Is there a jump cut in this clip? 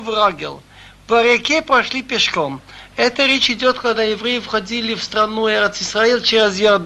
no; 0 cuts

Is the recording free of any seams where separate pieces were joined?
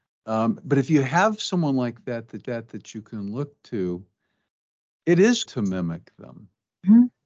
no; 2 cuts; at 2.4 s, 5.5 s

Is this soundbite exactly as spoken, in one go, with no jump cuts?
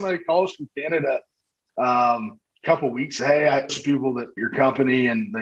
no; 4 cuts; at 2.5 s, 3.2 s, 3.7 s, 4.4 s

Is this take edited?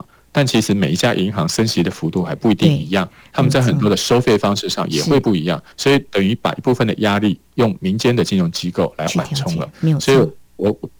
yes; 1 cut; at 5.7 s

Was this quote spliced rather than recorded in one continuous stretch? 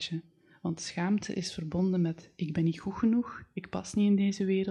no; 0 cuts

